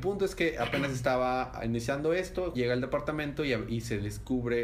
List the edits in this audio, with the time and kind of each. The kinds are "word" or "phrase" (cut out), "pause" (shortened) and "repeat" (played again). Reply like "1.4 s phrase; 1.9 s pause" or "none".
2.5 s phrase